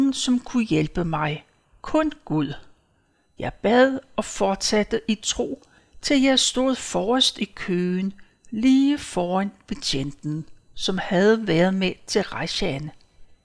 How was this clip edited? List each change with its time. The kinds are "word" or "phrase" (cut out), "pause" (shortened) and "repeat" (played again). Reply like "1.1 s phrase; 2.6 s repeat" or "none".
none